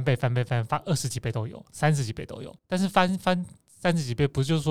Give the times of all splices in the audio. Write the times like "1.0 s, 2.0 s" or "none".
2.6 s